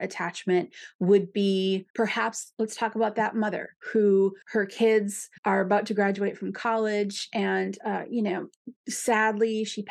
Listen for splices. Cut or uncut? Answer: cut